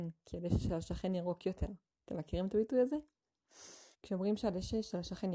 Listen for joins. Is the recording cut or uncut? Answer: cut